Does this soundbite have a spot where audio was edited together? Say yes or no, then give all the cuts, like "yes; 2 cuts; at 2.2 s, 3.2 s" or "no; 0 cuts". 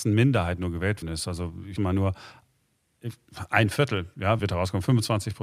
yes; 3 cuts; at 1.0 s, 1.8 s, 4.4 s